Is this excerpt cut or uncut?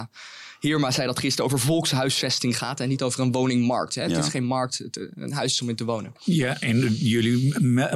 uncut